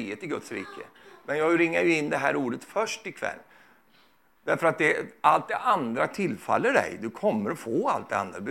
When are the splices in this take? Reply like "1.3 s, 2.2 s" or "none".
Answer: none